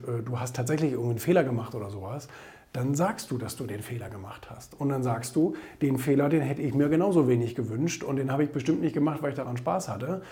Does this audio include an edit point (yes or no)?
no